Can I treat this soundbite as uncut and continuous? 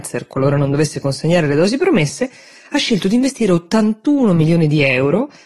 yes; 0 cuts

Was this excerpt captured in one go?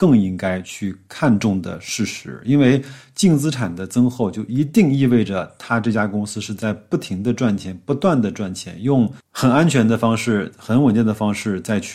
yes; 0 cuts

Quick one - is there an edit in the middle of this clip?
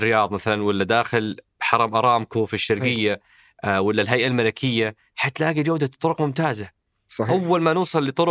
no; 0 cuts

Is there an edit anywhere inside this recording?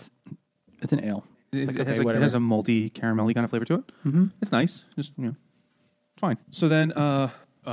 yes; 1 cut; at 6.4 s

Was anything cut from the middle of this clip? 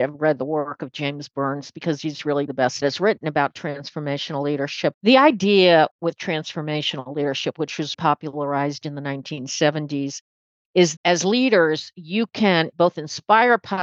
yes; 5 cuts; at 2.5 s, 2.8 s, 5.0 s, 7.9 s, 11.0 s

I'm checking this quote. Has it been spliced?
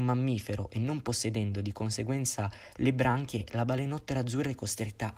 no; 0 cuts

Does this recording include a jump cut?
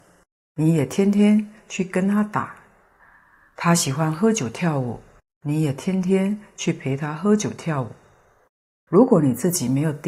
no; 0 cuts

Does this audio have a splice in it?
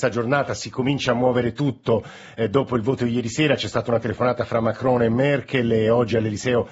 no; 0 cuts

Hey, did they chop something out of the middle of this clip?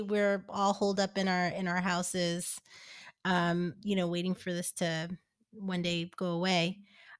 no; 0 cuts

